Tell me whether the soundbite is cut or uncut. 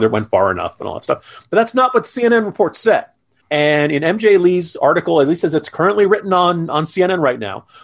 uncut